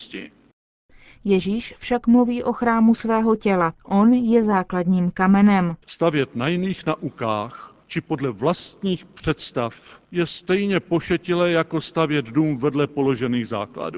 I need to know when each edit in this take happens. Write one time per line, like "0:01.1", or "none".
0:03.8
0:05.8
0:07.8
0:10.0